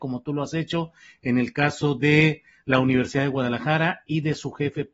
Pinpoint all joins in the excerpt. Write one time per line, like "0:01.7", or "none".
none

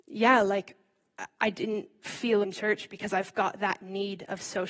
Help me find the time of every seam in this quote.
0:02.4

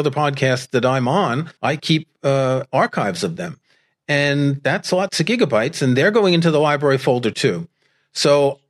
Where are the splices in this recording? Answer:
0:01.6

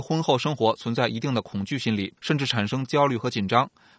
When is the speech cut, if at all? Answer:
0:02.2

